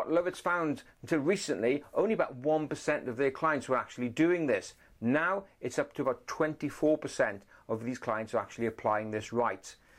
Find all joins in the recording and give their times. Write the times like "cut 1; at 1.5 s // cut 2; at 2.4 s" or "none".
none